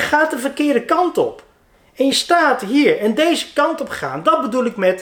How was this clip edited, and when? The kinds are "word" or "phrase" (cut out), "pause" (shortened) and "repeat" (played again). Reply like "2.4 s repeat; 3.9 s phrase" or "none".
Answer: none